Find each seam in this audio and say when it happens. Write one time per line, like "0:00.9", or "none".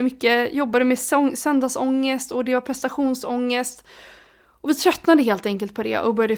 none